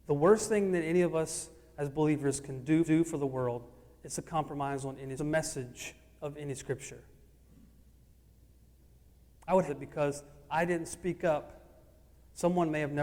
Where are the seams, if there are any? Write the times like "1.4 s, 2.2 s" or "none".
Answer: 2.8 s, 5.2 s, 9.7 s